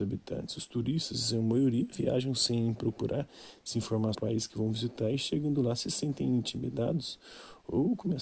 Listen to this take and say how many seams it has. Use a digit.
1